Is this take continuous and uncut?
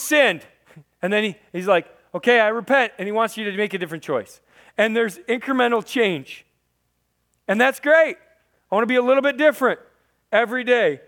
yes; 0 cuts

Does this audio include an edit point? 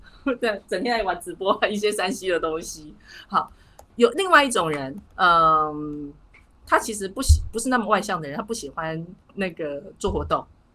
yes; 2 cuts; at 5.1 s, 9.2 s

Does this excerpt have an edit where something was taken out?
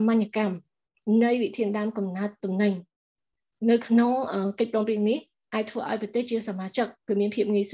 no; 0 cuts

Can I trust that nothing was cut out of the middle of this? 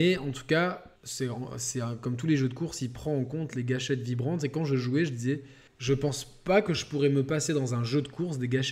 no; 2 cuts; at 1.0 s, 5.7 s

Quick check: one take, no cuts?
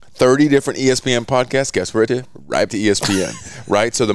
no; 2 cuts; at 2.1 s, 2.7 s

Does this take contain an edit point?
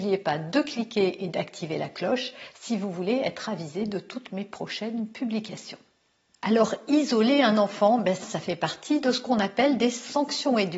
yes; 1 cut; at 8.2 s

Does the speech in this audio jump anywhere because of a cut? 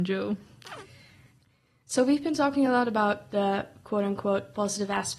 no; 0 cuts

